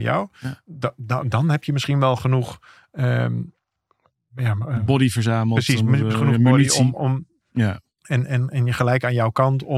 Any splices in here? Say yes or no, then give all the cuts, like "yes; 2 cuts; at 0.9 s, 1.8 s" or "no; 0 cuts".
no; 0 cuts